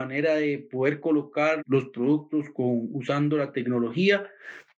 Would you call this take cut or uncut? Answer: cut